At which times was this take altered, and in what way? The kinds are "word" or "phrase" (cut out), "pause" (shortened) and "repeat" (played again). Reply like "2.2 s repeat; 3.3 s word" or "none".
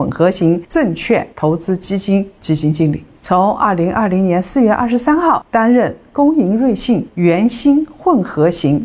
1.3 s pause

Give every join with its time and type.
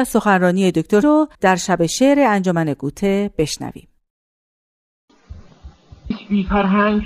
1.0 s word; 1.3 s pause; 6.1 s phrase

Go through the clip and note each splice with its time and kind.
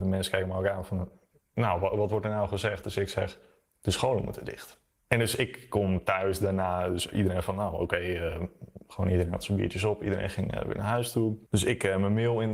none

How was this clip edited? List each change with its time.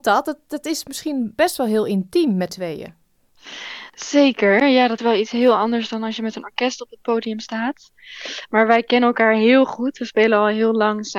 2.5 s word; 5.0 s word

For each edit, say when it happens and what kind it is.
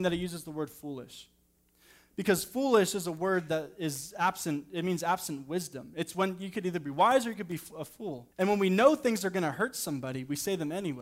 8.3 s pause

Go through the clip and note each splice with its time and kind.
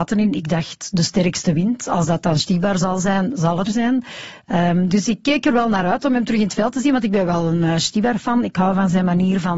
3.7 s word

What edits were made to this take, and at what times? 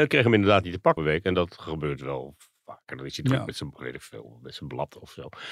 1.0 s word

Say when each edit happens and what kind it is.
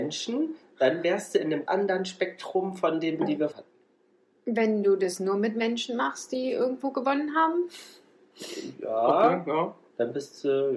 1.7 s word; 3.2 s word; 3.5 s phrase

